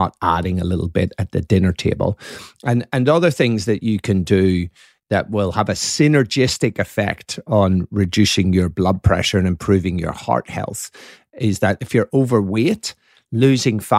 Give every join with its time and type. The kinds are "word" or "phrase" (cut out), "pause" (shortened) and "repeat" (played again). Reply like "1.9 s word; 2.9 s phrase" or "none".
none